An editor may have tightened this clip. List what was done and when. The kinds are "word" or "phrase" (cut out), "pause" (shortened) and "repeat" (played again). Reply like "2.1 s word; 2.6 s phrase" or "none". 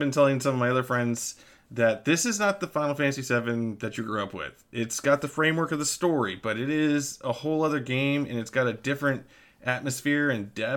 none

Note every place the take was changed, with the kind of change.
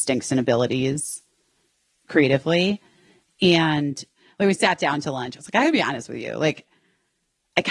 none

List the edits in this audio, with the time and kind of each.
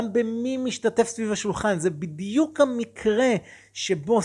none

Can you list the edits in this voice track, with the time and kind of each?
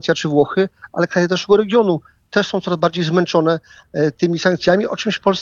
none

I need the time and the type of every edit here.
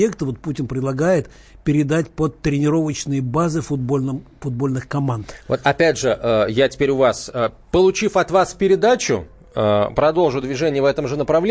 none

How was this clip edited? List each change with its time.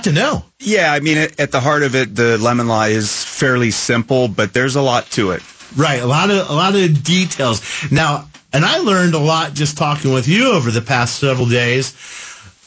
none

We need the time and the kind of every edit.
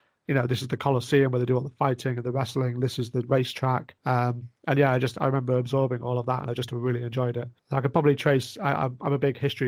4.0 s pause; 7.6 s pause

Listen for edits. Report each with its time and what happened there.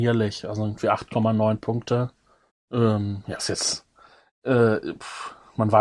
2.5 s pause; 3.4 s word

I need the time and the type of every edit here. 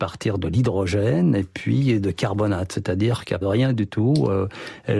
3.4 s word

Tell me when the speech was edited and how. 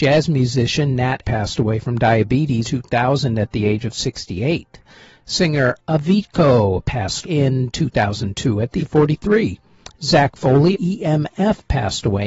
1.2 s word; 2.6 s word; 5.8 s word; 7.2 s word; 8.8 s word; 10.7 s word

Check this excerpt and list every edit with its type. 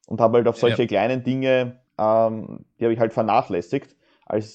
1.9 s pause

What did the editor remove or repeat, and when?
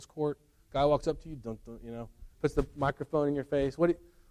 2.3 s pause

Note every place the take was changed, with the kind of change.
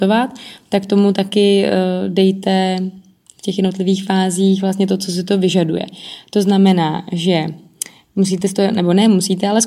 none

